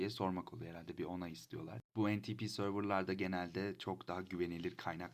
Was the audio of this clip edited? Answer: yes; 1 cut; at 1.9 s

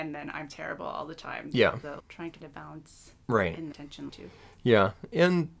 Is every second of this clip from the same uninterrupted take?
no; 5 cuts; at 2.0 s, 2.4 s, 3.2 s, 3.7 s, 4.1 s

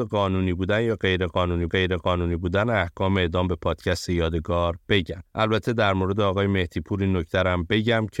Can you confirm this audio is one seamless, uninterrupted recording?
no; 1 cut; at 1.7 s

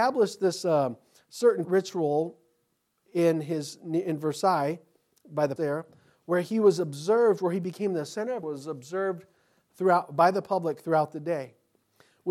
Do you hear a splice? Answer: yes; 3 cuts; at 1.6 s, 5.6 s, 8.4 s

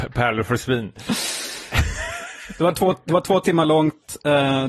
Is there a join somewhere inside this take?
no; 0 cuts

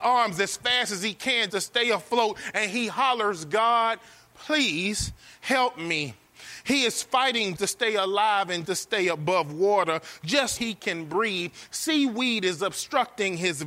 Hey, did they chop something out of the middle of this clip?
yes; 4 cuts; at 1.5 s, 7.5 s, 8.6 s, 10.6 s

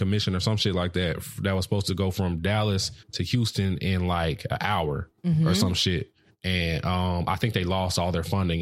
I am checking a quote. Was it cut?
yes; 3 cuts; at 3.0 s, 5.2 s, 6.3 s

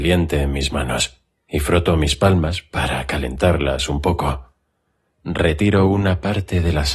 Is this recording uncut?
yes; 0 cuts

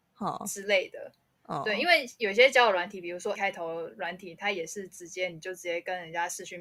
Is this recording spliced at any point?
yes; 1 cut; at 3.4 s

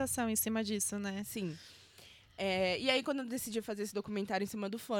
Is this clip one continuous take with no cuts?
yes; 0 cuts

